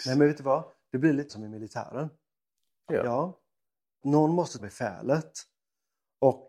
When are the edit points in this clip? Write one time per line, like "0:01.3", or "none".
0:01.3
0:02.9
0:04.0
0:04.6

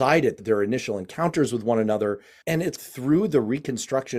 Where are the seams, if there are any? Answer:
none

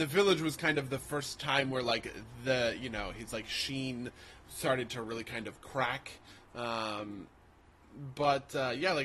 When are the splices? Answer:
none

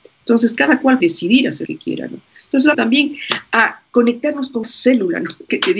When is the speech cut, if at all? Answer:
0:01.0
0:01.7
0:02.7
0:04.6

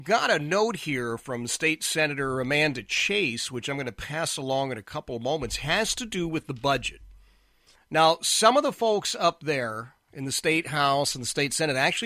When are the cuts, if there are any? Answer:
none

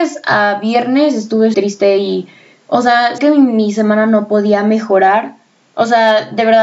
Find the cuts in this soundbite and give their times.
0:01.5
0:03.2

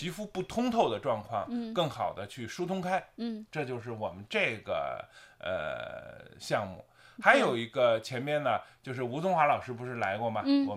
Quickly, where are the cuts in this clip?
0:03.5

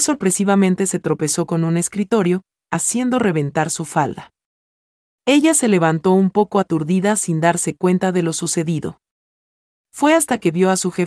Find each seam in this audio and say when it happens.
none

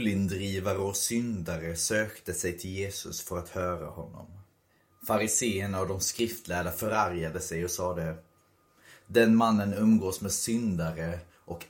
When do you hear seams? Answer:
none

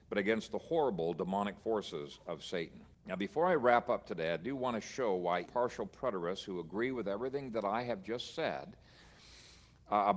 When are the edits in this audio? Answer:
0:02.9
0:05.5

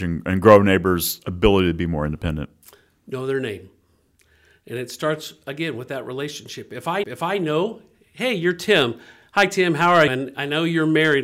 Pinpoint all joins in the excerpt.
0:07.0
0:10.1

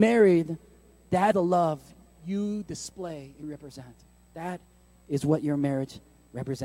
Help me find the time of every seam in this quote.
0:01.3
0:03.4

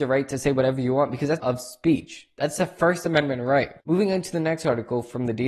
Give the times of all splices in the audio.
0:01.4
0:03.8

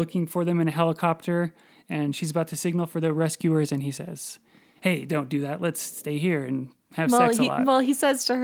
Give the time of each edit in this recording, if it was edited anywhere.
none

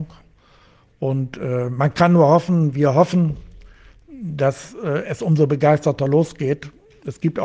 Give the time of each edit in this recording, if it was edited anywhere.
none

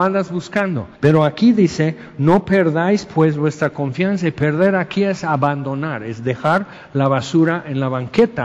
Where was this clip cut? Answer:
0:00.9

